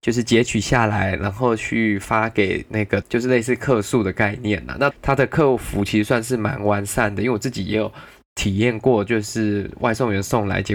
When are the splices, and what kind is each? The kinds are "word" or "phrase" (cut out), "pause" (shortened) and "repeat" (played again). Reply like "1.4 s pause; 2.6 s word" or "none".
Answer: 3.0 s word; 4.9 s word